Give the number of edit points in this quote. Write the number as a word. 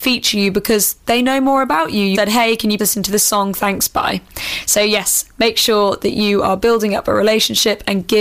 two